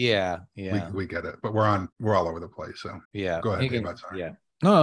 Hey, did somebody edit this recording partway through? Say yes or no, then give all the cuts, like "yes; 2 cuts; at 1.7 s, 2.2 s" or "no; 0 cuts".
yes; 2 cuts; at 1.9 s, 3.0 s